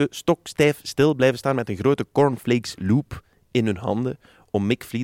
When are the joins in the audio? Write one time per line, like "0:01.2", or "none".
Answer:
none